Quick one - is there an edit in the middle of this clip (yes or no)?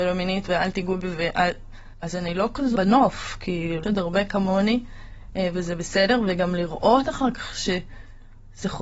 yes